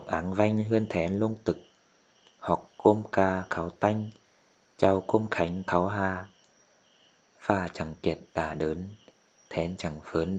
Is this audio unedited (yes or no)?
yes